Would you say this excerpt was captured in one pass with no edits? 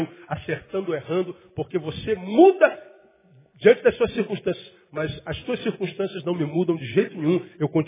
yes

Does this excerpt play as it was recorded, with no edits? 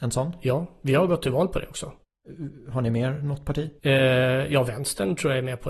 no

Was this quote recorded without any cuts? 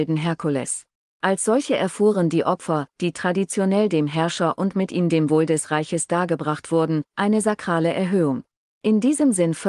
yes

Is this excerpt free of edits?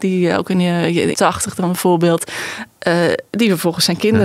no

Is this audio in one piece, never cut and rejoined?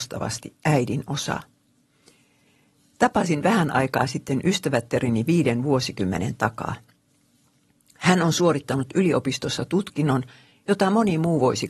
yes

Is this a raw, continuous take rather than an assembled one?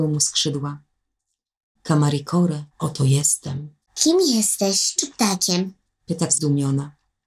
no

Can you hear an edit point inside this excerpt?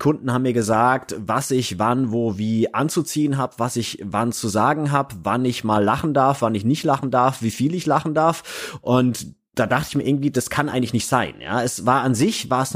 no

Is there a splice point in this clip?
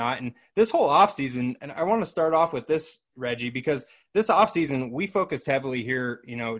no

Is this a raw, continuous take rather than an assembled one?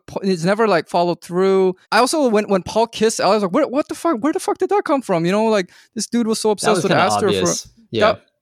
no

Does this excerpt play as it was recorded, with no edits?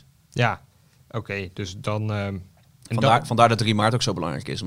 yes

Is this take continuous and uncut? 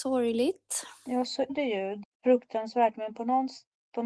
no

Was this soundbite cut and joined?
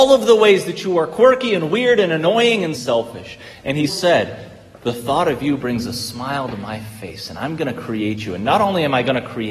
yes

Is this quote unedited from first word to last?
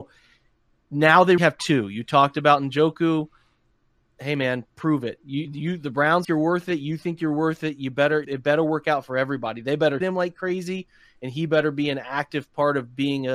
no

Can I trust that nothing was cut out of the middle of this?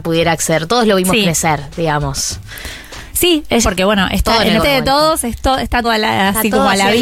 no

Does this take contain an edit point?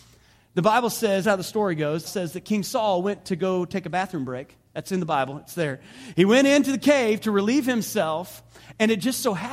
yes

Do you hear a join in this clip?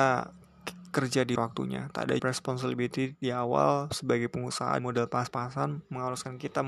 yes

